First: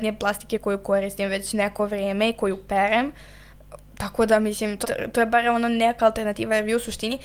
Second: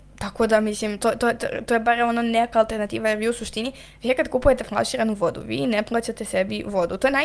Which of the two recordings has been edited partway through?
first; 1 cut; at 4.8 s

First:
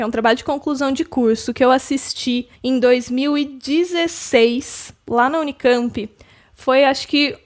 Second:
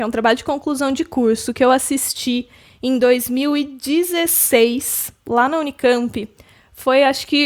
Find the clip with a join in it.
first; 1 cut; at 2.6 s

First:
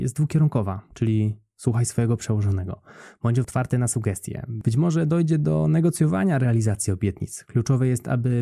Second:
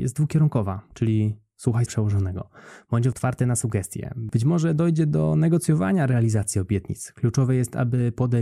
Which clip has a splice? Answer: second; 1 cut; at 1.9 s

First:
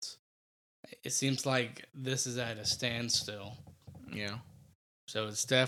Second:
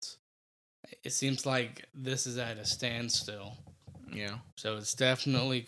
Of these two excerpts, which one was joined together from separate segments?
second; 1 cut; at 4.5 s

